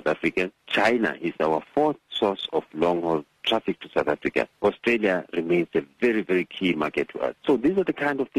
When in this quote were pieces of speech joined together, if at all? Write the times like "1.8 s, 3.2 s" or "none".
4.5 s